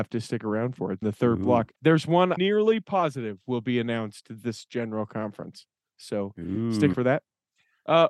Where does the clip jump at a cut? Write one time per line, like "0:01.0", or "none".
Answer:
0:01.0
0:01.8
0:02.4
0:06.9